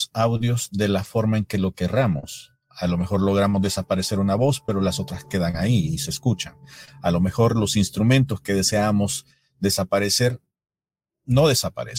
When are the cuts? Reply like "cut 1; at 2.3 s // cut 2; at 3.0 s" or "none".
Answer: none

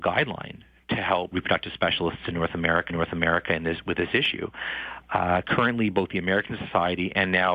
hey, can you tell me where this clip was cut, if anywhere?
cut 1; at 1.3 s // cut 2; at 2.9 s

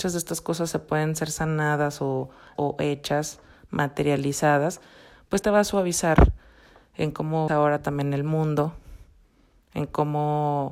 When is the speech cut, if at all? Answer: cut 1; at 2.6 s // cut 2; at 5.4 s // cut 3; at 7.5 s

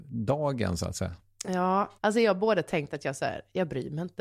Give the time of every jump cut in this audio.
cut 1; at 2.0 s

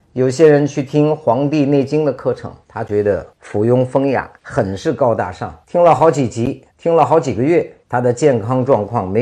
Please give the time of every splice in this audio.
cut 1; at 2.6 s // cut 2; at 3.3 s // cut 3; at 4.4 s // cut 4; at 5.6 s // cut 5; at 6.7 s // cut 6; at 7.8 s

